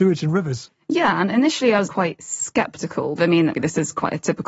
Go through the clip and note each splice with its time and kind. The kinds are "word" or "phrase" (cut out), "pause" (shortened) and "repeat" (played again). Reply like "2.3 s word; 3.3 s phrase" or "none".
1.9 s word; 3.2 s word; 3.5 s word